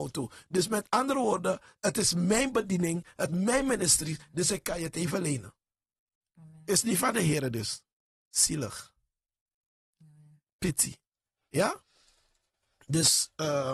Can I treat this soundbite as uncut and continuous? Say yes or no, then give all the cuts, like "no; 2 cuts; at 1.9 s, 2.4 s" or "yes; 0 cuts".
no; 2 cuts; at 3.3 s, 7.9 s